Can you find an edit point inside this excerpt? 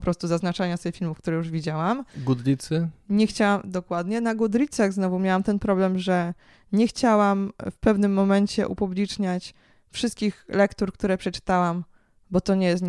no; 0 cuts

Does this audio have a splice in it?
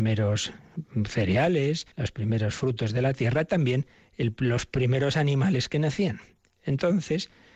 yes; 1 cut; at 1.9 s

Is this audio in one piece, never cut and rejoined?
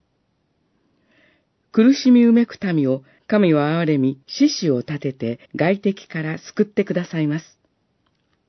no; 3 cuts; at 3.2 s, 4.2 s, 5.5 s

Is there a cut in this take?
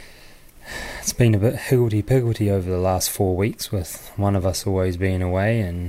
no; 0 cuts

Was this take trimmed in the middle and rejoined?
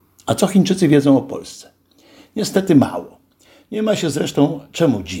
no; 0 cuts

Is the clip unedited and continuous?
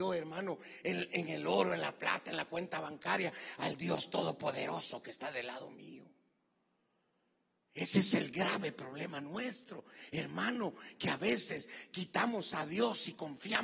yes; 0 cuts

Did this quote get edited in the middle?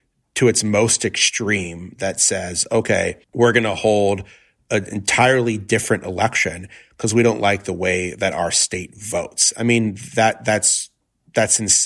yes; 1 cut; at 3.2 s

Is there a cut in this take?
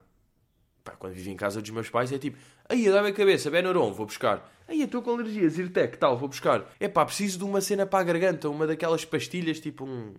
yes; 1 cut; at 6.7 s

